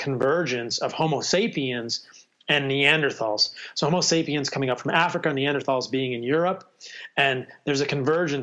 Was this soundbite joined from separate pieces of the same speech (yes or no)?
no